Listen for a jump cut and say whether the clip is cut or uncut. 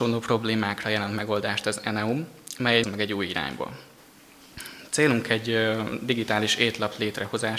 cut